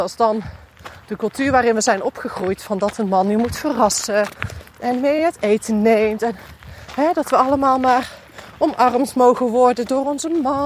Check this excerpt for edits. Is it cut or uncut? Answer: uncut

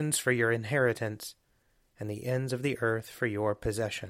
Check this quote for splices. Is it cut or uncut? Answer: uncut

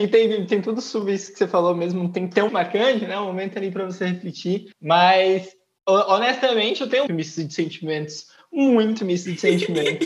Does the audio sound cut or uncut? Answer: cut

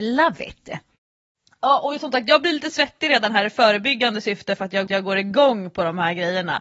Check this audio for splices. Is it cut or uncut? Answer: cut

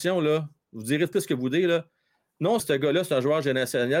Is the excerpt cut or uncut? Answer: cut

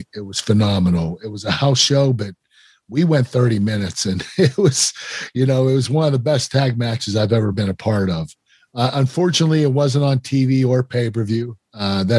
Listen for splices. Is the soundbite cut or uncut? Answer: uncut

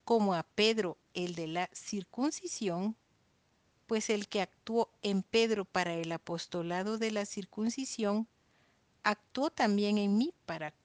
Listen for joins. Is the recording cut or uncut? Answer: uncut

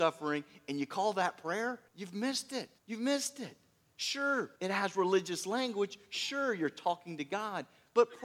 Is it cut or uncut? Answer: cut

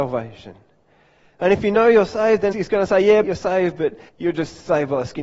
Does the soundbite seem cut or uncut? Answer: cut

